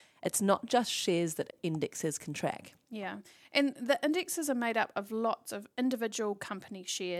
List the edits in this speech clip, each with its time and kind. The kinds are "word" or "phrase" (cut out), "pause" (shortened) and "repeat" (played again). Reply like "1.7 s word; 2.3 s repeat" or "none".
none